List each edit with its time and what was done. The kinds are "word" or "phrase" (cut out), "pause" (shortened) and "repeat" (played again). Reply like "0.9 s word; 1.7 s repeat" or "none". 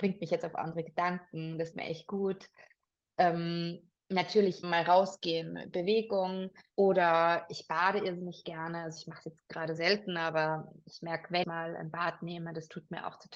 1.7 s word; 4.6 s word; 6.7 s pause; 9.8 s word; 11.4 s word